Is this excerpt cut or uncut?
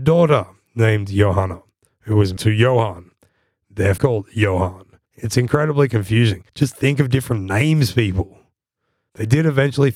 cut